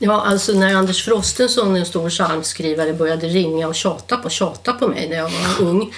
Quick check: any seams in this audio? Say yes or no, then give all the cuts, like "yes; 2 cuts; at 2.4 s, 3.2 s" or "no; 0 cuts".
yes; 1 cut; at 4.2 s